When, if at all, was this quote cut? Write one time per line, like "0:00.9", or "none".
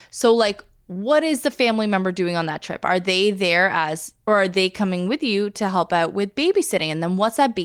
0:04.3